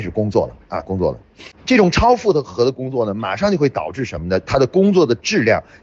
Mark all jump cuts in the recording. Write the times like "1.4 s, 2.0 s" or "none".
1.6 s